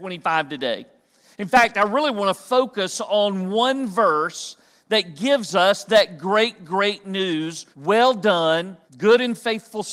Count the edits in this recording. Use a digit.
2